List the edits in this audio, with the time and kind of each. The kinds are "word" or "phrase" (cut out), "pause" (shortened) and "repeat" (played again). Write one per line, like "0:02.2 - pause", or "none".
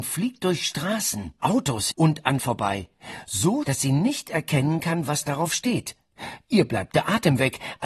0:01.4 - word
0:01.9 - word
0:02.4 - word
0:03.6 - word